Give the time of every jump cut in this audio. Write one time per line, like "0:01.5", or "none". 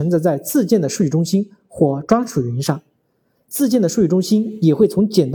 none